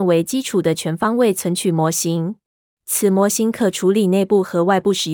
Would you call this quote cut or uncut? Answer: cut